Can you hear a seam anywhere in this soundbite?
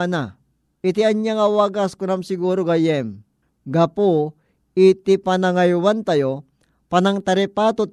no; 0 cuts

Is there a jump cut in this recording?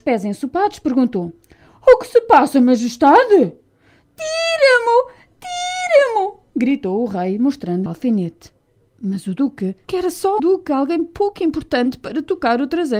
yes; 3 cuts; at 7.9 s, 9.8 s, 10.4 s

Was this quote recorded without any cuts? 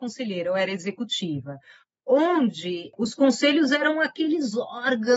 yes; 0 cuts

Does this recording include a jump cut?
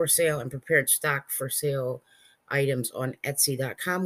no; 0 cuts

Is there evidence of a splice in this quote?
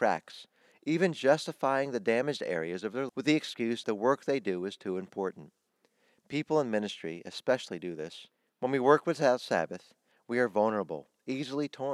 yes; 2 cuts; at 3.1 s, 3.8 s

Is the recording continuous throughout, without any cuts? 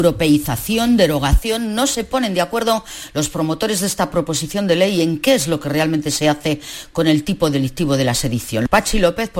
yes; 0 cuts

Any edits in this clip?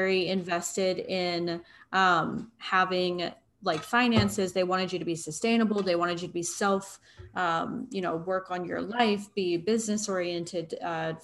no; 0 cuts

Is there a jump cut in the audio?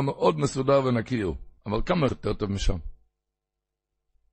yes; 2 cuts; at 1.6 s, 2.1 s

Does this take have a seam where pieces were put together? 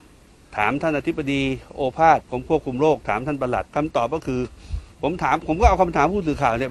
yes; 2 cuts; at 2.2 s, 3.7 s

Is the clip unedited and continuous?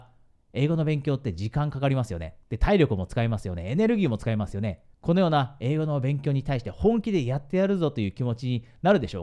no; 2 cuts; at 2.4 s, 4.9 s

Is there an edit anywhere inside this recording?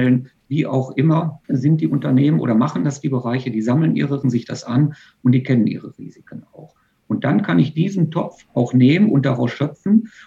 yes; 2 cuts; at 1.4 s, 4.2 s

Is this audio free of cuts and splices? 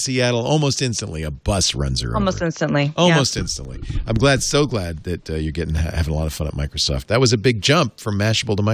yes; 0 cuts

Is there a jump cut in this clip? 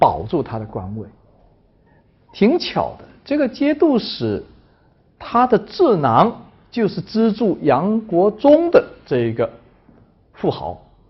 no; 0 cuts

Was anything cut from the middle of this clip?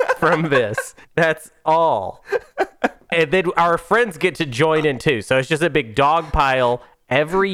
yes; 1 cut; at 1.0 s

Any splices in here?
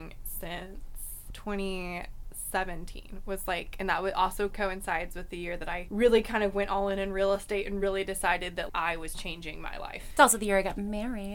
no; 0 cuts

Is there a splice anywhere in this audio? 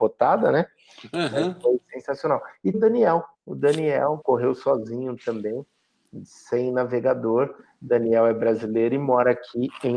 yes; 3 cuts; at 2.7 s, 3.3 s, 4.2 s

